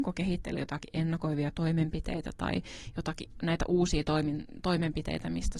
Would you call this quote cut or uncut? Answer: uncut